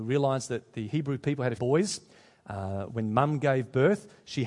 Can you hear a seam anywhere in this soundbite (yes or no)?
yes